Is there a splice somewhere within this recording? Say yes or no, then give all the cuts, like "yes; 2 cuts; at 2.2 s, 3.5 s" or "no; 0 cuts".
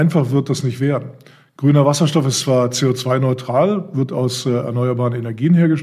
no; 0 cuts